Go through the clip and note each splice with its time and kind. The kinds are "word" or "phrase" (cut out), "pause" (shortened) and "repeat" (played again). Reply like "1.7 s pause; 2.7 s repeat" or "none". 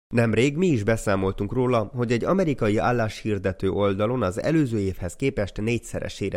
none